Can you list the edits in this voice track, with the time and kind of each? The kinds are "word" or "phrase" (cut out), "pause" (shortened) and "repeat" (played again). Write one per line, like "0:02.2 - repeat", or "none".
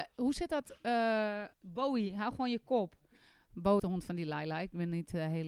0:01.5 - pause
0:03.8 - word